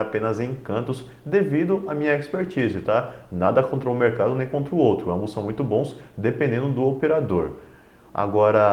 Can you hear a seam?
no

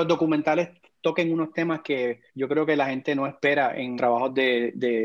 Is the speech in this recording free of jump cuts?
no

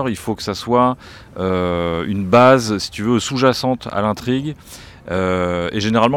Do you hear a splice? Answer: no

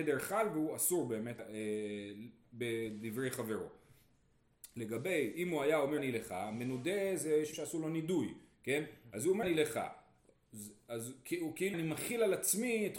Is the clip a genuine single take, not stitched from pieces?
no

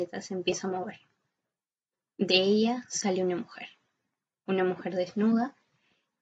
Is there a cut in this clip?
no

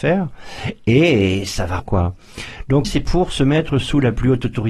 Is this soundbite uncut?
no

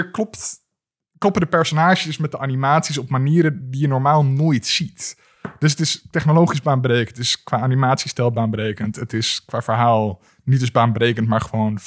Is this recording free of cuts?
yes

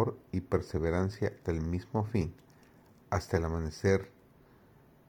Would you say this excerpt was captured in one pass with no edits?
no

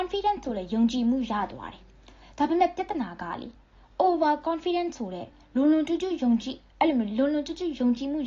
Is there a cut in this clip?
no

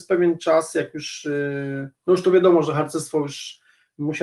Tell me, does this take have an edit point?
no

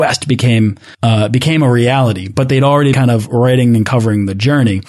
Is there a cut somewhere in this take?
yes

